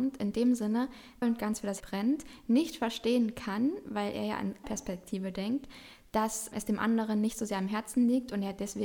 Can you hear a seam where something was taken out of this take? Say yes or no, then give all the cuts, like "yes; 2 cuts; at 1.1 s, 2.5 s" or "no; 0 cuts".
yes; 4 cuts; at 1.2 s, 1.8 s, 4.6 s, 6.5 s